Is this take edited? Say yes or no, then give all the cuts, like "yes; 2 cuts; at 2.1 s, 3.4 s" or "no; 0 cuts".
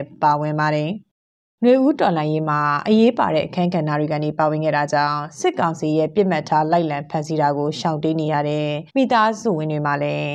yes; 1 cut; at 8.9 s